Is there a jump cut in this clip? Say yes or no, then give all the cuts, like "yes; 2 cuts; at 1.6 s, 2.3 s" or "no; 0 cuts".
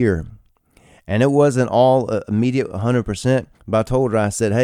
yes; 1 cut; at 3.5 s